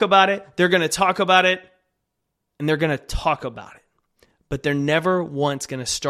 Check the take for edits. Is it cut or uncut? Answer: uncut